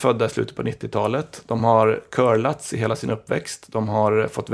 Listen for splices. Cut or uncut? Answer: uncut